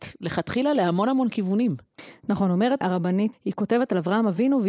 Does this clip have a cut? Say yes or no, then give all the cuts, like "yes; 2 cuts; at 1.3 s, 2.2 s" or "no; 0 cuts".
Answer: yes; 2 cuts; at 2.8 s, 3.3 s